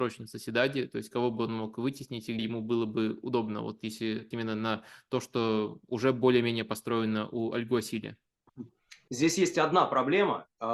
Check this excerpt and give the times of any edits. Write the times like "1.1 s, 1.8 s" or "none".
2.4 s, 4.3 s, 9.1 s